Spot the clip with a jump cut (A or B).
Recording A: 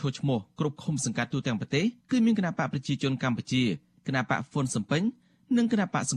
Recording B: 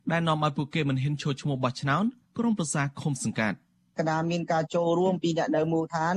A